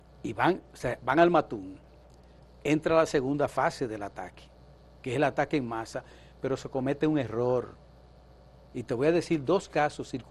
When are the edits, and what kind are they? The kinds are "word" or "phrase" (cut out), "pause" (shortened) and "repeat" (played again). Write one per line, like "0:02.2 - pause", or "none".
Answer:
none